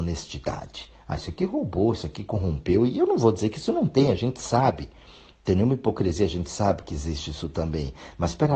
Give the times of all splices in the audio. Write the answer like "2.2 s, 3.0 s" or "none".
none